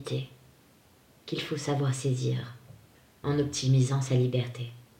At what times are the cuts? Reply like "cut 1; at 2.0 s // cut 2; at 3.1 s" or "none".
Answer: none